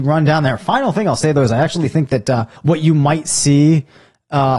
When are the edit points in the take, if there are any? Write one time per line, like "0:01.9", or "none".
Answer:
0:02.6